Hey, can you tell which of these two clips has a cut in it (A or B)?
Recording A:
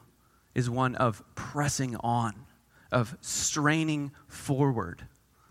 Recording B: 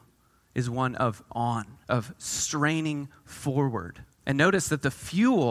B